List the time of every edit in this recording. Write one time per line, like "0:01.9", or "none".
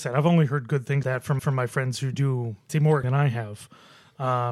0:01.0
0:01.4
0:02.7
0:03.0